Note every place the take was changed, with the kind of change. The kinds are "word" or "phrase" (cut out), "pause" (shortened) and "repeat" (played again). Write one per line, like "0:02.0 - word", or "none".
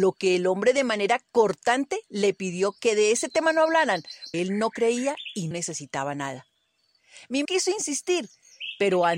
0:02.0 - pause
0:04.3 - word
0:05.5 - word
0:07.4 - word